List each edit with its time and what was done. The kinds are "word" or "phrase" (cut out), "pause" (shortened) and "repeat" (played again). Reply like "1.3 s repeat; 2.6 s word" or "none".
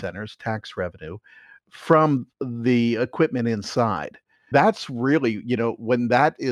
4.5 s word